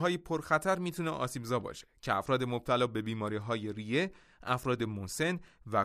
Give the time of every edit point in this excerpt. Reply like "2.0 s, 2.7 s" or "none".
none